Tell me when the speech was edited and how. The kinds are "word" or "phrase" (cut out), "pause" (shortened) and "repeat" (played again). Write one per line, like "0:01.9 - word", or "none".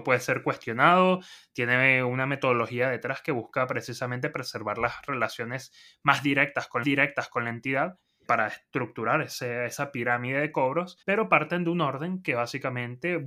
0:06.8 - repeat
0:08.3 - word
0:11.0 - pause

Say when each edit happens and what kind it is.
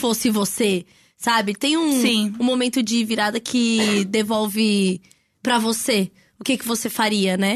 none

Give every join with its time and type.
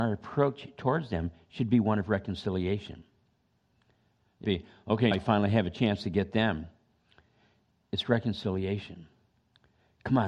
0:04.4 - word
0:05.1 - word

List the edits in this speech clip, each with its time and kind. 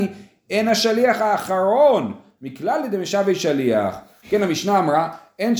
none

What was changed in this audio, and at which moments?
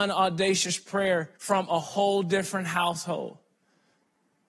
0:01.4 - pause

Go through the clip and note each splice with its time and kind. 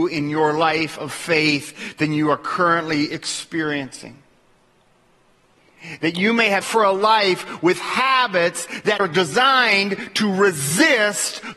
0:06.6 - word
0:09.0 - word

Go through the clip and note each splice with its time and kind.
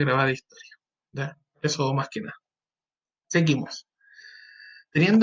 none

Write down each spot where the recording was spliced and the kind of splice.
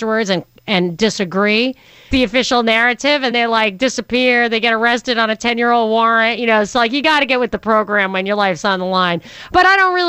0:02.1 - word
0:03.3 - word

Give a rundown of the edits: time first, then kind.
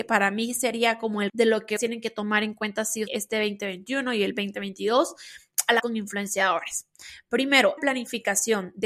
0:01.3 - word
0:01.8 - word
0:03.1 - word
0:05.8 - phrase
0:07.8 - phrase

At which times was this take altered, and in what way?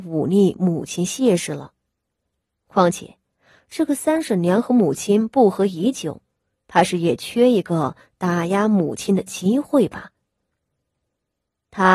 none

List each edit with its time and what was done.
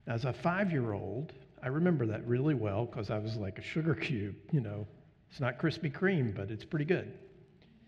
none

